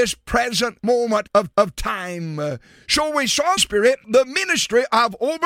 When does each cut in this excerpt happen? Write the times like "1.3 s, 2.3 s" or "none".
1.5 s, 3.6 s, 4.0 s

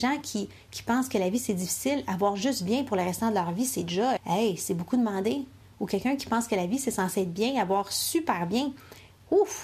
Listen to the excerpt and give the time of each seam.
4.2 s

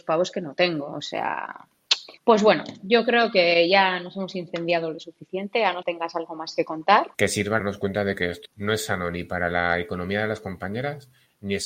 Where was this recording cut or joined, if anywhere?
2.2 s, 5.8 s, 7.1 s, 7.6 s, 8.4 s

